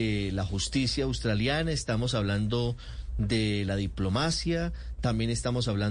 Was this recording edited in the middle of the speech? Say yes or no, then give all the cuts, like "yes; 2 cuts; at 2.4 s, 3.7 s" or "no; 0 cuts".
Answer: no; 0 cuts